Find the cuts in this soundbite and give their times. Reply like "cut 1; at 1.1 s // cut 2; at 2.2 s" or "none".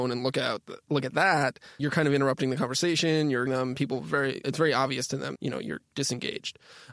cut 1; at 1.8 s // cut 2; at 3.5 s // cut 3; at 4.4 s // cut 4; at 5.3 s